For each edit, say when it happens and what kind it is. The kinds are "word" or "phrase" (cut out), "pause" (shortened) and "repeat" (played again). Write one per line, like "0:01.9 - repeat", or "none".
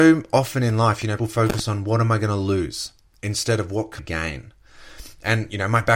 0:01.2 - word
0:04.0 - word